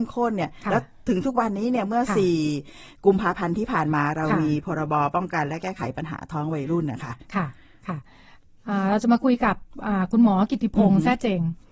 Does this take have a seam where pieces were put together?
no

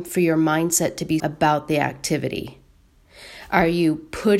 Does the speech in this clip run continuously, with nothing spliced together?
no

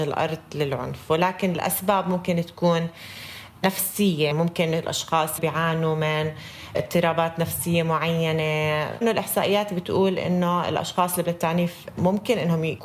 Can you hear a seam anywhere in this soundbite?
yes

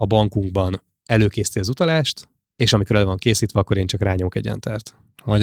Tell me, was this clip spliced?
no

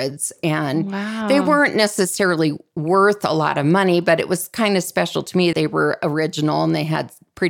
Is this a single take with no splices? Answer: no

